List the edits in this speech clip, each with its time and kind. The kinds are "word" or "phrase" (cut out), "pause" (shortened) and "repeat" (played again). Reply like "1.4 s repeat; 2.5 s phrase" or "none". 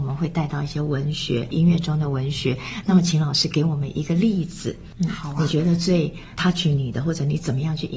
none